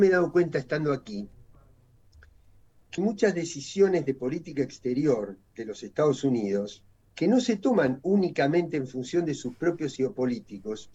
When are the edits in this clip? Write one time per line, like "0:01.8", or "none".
0:03.0
0:06.9
0:10.0